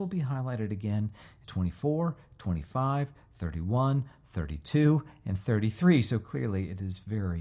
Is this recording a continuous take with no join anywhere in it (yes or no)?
no